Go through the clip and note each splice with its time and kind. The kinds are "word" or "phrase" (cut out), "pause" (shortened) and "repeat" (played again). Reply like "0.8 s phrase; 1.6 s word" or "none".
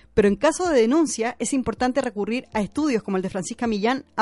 none